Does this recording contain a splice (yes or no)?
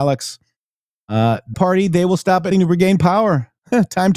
yes